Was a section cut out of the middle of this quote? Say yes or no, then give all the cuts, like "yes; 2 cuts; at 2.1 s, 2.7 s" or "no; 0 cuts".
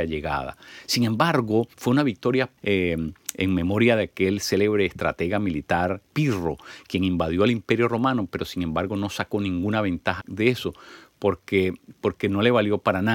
yes; 4 cuts; at 1.7 s, 2.6 s, 10.2 s, 11.9 s